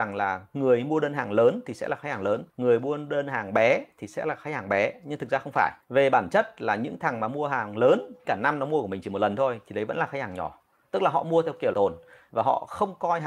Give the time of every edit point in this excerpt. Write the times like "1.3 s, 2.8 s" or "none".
2.5 s, 5.8 s, 8.2 s, 11.7 s